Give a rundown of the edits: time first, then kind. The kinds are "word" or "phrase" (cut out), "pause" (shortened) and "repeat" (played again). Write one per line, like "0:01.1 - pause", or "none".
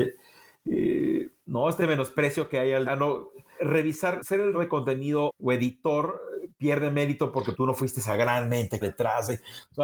0:01.8 - word
0:02.8 - word
0:03.6 - word
0:04.2 - word
0:04.5 - word
0:05.3 - word
0:07.5 - word
0:08.8 - word